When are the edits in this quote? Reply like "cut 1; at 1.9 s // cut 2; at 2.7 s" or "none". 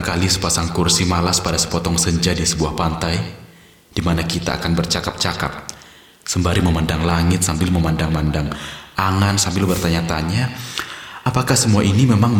none